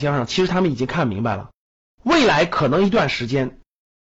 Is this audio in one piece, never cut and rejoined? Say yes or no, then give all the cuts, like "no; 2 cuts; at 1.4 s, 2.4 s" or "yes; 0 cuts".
yes; 0 cuts